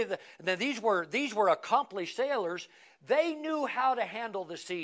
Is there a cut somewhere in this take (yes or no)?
no